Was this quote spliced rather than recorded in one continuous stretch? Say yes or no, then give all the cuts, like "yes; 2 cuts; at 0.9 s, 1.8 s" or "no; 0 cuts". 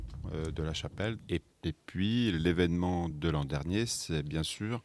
no; 0 cuts